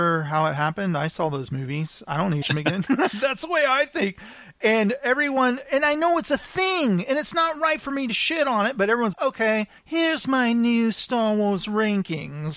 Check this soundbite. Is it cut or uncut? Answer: cut